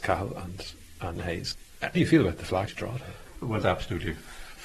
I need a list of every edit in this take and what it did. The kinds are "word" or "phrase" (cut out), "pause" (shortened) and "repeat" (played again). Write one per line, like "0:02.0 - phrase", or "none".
0:01.1 - word
0:01.9 - word
0:02.7 - word
0:03.6 - word